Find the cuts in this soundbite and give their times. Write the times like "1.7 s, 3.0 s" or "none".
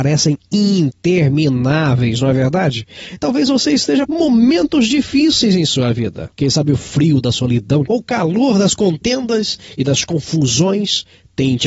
4.1 s, 6.3 s, 7.9 s